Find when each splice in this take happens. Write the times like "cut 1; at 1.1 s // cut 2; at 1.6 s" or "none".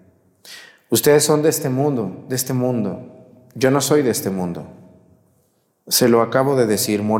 none